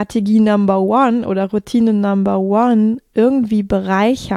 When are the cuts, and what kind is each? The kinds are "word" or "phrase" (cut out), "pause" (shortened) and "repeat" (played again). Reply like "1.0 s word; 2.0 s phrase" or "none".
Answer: none